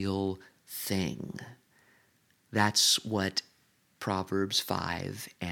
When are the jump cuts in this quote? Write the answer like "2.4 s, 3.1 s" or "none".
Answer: none